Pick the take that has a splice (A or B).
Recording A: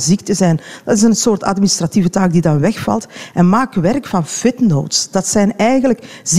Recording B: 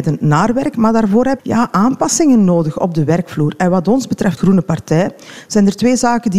B